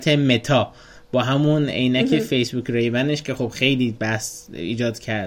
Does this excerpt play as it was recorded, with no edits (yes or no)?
yes